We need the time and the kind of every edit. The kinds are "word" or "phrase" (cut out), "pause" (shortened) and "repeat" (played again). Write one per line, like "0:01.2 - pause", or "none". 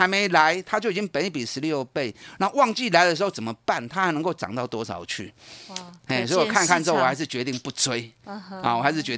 none